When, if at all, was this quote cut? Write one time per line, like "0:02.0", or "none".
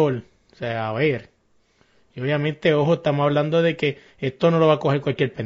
none